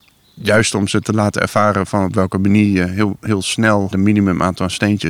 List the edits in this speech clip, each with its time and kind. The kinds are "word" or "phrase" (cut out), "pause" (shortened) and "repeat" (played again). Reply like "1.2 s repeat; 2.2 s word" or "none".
3.9 s phrase